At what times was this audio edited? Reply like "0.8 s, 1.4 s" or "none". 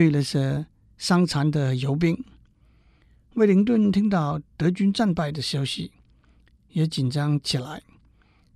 4.5 s